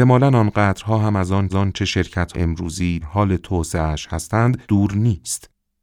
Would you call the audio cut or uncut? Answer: cut